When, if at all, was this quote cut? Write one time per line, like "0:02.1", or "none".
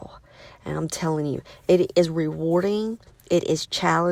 none